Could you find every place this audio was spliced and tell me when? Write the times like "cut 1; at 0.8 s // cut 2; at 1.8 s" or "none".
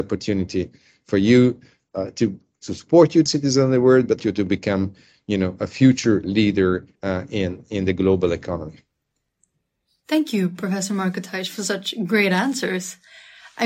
cut 1; at 3.3 s // cut 2; at 4.2 s // cut 3; at 7.0 s